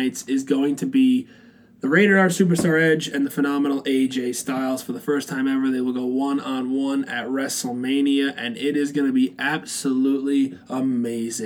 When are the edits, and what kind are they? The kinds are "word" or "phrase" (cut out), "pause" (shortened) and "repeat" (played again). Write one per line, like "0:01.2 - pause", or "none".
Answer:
none